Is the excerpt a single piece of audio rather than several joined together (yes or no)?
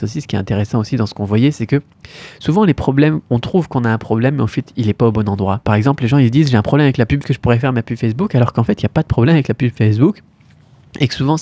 no